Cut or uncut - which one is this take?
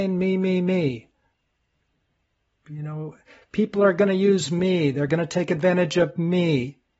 uncut